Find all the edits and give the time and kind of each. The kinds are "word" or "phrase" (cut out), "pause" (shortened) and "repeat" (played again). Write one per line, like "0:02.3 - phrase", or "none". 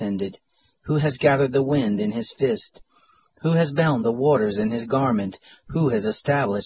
none